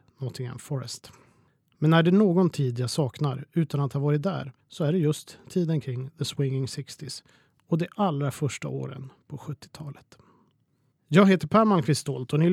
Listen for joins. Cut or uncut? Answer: cut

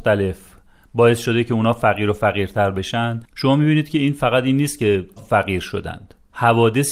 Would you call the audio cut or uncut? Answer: cut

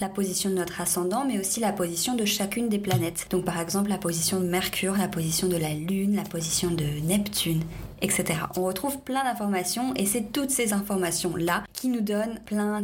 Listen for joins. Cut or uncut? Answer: uncut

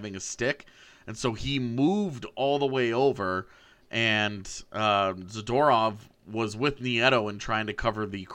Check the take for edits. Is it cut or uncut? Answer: uncut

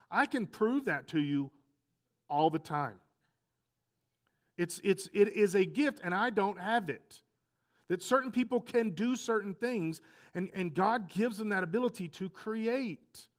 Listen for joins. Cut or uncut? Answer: uncut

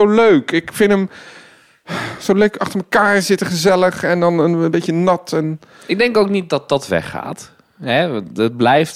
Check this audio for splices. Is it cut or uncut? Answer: uncut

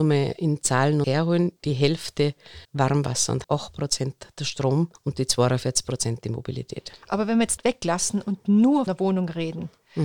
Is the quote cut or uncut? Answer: cut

